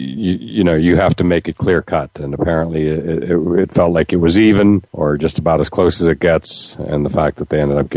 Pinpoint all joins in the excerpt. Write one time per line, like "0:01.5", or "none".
0:04.9